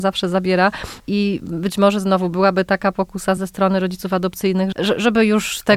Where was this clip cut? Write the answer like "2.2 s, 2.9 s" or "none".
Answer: 3.4 s, 4.7 s

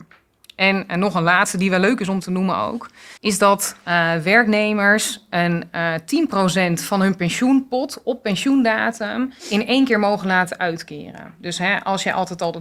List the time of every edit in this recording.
3.2 s, 9.4 s

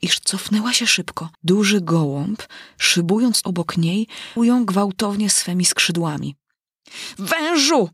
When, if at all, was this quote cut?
1.3 s, 3.4 s, 4.4 s

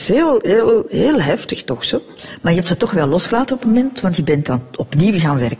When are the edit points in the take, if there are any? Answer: 3.6 s

